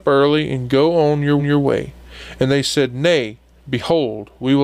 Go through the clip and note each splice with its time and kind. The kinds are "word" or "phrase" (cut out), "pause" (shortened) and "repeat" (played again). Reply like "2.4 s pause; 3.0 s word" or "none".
1.4 s repeat